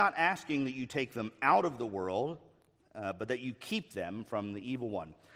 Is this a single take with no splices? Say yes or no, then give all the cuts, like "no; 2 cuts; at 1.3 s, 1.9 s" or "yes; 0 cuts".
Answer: yes; 0 cuts